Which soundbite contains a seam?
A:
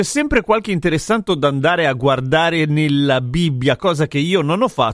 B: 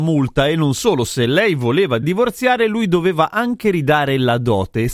A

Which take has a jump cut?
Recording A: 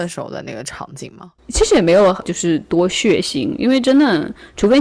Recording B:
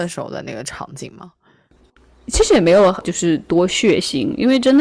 A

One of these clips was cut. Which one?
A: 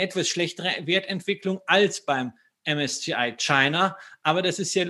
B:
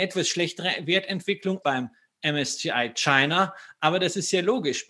B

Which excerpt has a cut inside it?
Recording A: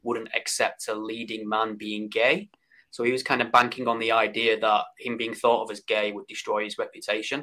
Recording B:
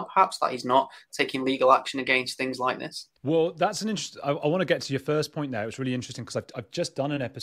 B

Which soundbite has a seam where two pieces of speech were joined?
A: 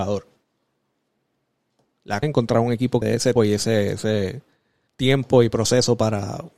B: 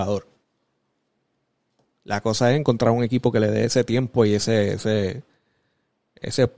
A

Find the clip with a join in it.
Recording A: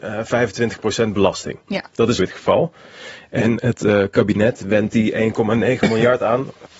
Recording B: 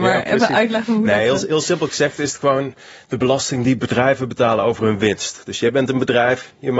A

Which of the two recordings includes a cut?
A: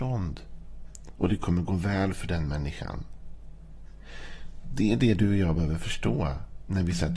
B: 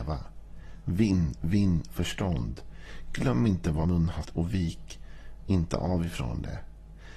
B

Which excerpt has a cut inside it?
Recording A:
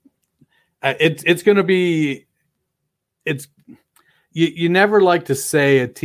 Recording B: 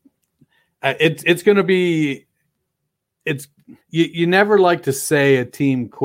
B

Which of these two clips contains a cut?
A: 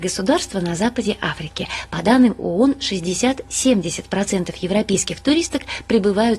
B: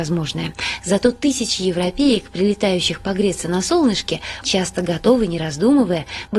B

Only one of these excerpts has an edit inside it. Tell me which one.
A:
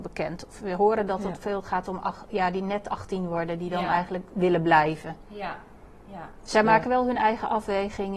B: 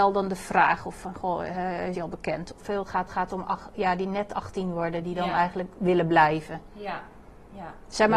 B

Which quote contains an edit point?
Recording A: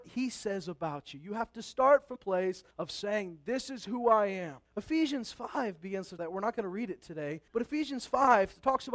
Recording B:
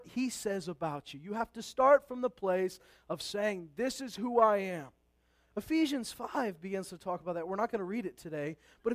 A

